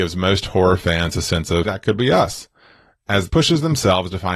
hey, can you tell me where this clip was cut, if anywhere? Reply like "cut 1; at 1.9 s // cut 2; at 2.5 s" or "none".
cut 1; at 1.6 s // cut 2; at 3.3 s